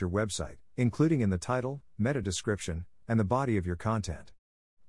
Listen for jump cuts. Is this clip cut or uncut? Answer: uncut